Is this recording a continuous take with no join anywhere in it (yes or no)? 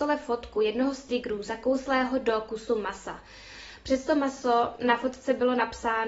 yes